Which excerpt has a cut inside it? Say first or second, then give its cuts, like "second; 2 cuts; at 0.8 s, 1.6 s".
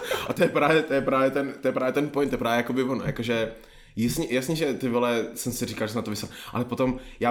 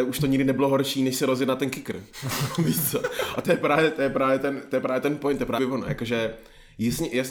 second; 1 cut; at 5.6 s